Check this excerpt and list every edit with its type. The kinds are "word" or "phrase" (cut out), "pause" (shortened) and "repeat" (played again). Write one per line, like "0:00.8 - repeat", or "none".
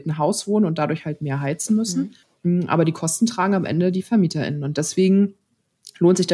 0:02.2 - pause